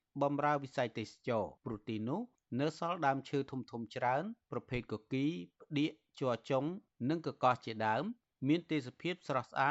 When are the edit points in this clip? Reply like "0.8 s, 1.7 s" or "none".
1.6 s